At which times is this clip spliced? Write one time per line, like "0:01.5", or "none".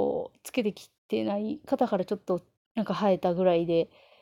0:01.0
0:02.6